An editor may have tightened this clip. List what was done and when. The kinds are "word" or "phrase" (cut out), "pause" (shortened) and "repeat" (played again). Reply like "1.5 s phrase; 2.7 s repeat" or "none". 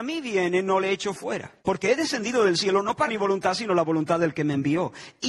1.6 s pause; 3.1 s word